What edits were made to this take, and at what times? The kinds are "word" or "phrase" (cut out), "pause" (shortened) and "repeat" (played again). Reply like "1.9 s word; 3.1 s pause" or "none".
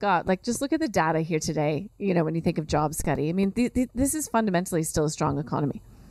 none